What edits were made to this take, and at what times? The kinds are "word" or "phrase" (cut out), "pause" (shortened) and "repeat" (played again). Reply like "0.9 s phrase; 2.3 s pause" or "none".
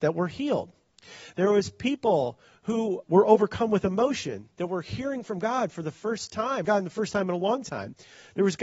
3.0 s word; 6.6 s phrase